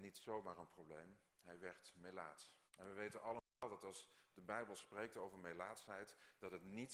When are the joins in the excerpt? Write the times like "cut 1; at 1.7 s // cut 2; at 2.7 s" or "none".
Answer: cut 1; at 1.3 s // cut 2; at 2.7 s